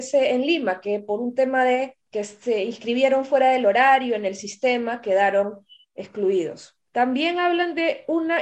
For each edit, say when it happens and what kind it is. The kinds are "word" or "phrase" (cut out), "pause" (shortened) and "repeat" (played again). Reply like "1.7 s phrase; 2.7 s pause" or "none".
2.0 s pause; 6.9 s pause